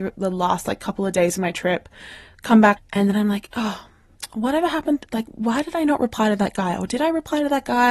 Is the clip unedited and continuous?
no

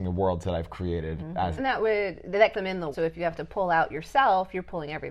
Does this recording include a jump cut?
yes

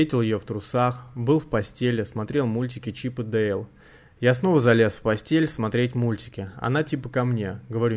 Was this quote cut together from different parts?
no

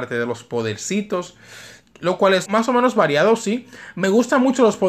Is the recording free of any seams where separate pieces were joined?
no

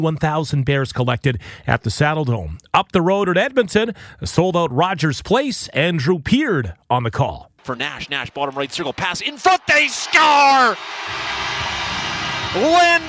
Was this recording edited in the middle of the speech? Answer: no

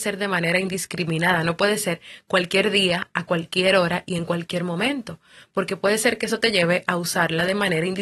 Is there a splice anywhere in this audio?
no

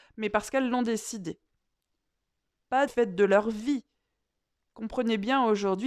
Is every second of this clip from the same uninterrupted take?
no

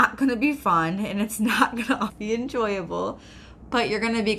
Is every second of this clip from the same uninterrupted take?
no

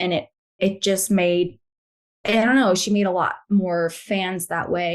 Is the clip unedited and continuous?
yes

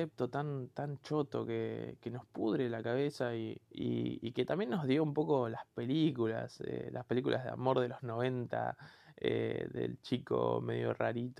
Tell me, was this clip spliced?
yes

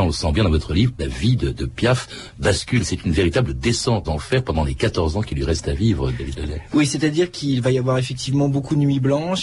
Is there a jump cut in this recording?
yes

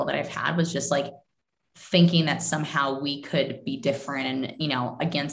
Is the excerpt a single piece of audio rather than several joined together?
yes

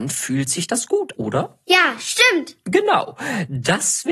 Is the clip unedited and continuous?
no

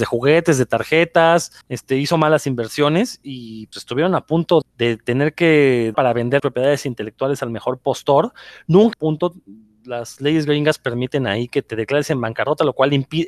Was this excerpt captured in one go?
no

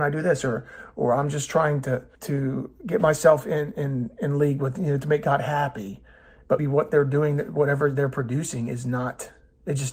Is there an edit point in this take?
yes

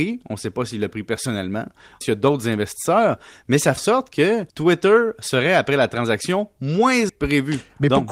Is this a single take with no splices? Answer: no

